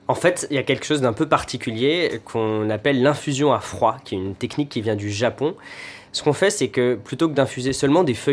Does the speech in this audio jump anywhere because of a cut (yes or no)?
no